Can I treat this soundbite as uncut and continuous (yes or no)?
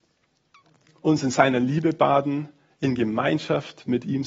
yes